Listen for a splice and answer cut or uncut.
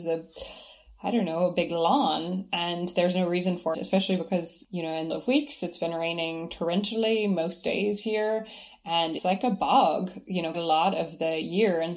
cut